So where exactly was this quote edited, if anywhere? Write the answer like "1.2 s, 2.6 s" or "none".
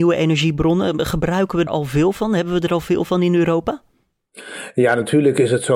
1.7 s